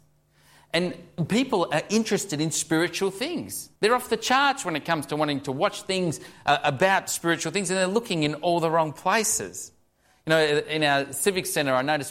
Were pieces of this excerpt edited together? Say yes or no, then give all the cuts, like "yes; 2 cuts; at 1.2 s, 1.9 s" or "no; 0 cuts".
yes; 1 cut; at 3.8 s